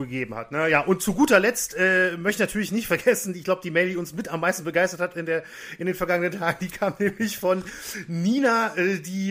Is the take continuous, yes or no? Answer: yes